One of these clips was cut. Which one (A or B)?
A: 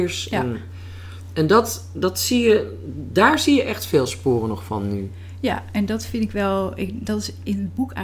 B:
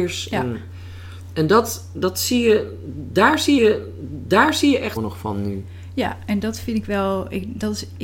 B